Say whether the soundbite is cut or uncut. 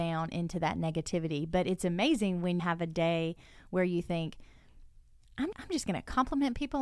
cut